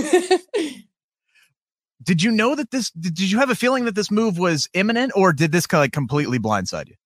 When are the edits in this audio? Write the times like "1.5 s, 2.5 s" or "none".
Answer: none